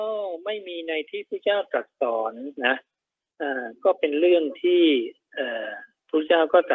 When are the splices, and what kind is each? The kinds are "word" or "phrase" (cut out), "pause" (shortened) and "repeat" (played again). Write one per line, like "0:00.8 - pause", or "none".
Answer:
0:02.6 - pause